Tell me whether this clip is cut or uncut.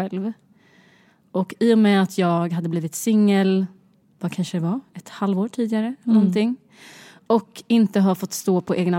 uncut